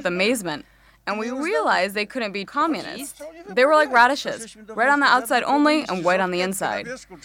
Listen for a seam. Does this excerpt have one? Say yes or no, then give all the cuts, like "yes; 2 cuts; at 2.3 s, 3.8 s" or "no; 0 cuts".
yes; 1 cut; at 2.5 s